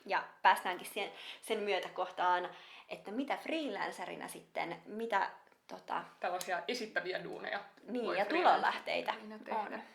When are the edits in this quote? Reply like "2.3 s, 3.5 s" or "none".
none